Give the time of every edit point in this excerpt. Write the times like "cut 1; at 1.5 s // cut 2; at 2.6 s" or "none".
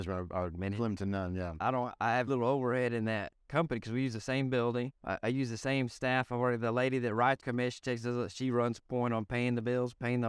cut 1; at 1.6 s // cut 2; at 2.3 s // cut 3; at 5.0 s // cut 4; at 7.4 s